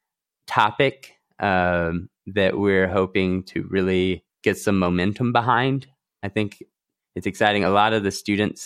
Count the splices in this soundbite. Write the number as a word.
one